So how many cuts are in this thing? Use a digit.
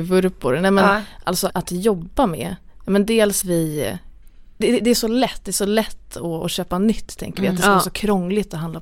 3